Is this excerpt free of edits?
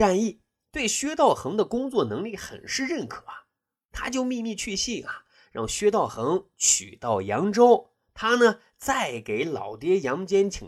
yes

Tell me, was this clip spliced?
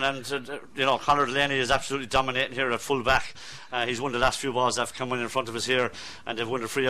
no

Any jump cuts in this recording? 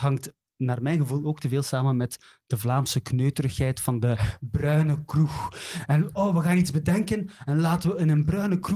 no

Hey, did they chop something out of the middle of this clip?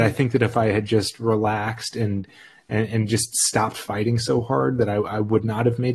no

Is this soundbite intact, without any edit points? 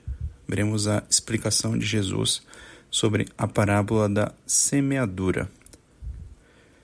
yes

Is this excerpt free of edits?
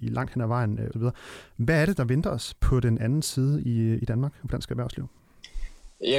no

